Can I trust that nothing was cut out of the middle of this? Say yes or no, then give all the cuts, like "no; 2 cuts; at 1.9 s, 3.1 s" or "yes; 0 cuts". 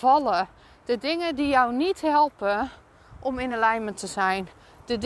yes; 0 cuts